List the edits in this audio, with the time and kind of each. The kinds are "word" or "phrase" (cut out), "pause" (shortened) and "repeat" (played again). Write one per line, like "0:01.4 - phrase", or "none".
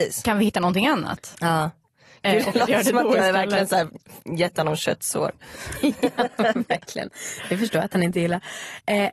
none